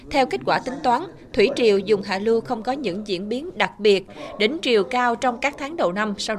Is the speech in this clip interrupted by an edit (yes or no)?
no